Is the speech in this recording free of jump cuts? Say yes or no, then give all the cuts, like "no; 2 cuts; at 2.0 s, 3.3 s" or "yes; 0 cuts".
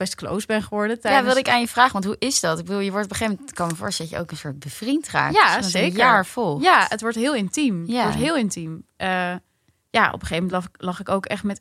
yes; 0 cuts